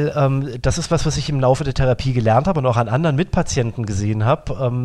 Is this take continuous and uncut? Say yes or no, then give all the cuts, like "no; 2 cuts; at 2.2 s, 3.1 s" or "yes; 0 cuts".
yes; 0 cuts